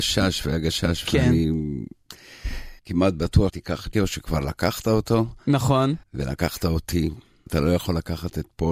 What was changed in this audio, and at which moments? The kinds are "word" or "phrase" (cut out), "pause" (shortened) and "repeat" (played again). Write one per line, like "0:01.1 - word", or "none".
0:01.0 - word
0:02.8 - pause
0:03.5 - word
0:03.9 - word
0:06.0 - pause
0:07.5 - word